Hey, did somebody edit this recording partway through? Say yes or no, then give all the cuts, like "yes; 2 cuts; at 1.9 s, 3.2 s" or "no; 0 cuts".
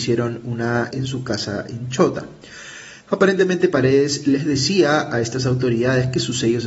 yes; 2 cuts; at 0.9 s, 3.0 s